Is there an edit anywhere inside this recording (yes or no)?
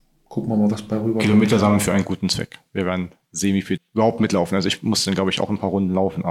yes